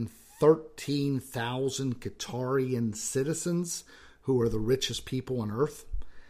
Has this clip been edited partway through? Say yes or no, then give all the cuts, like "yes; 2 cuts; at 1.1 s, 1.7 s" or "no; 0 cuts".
no; 0 cuts